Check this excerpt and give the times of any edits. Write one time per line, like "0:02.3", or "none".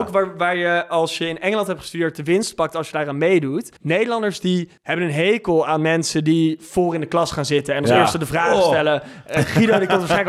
0:03.8
0:04.8